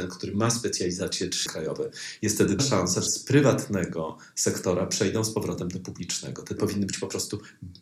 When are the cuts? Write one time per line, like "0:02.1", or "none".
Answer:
0:01.5
0:02.6
0:03.1
0:06.6